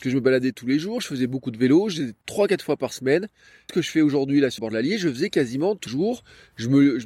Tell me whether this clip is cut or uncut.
cut